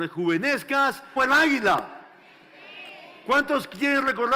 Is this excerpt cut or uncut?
cut